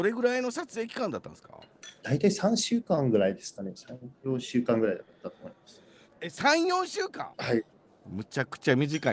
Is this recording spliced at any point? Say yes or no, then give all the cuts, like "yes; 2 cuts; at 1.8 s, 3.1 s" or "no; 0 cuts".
yes; 2 cuts; at 7.3 s, 7.7 s